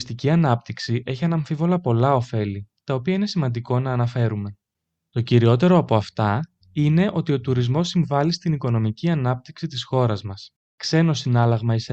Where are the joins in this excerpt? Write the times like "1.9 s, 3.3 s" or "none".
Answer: 4.7 s, 6.6 s, 10.6 s